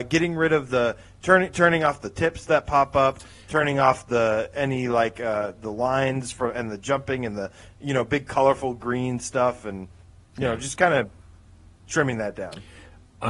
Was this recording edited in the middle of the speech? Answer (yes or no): no